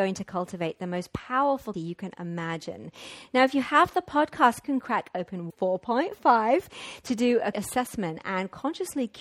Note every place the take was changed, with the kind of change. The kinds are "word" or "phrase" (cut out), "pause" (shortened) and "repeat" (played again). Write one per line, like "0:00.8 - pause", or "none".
0:01.7 - word
0:04.6 - phrase
0:05.5 - word
0:07.5 - word